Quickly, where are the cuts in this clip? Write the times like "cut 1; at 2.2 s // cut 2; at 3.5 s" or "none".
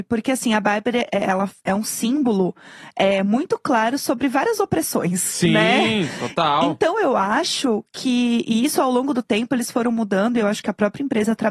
none